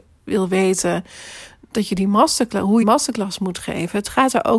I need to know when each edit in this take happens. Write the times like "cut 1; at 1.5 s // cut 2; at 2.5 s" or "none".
cut 1; at 2.8 s